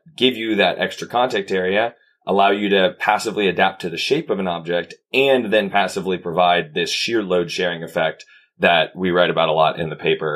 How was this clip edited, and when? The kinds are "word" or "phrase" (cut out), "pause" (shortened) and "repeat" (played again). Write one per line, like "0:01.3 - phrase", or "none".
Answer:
none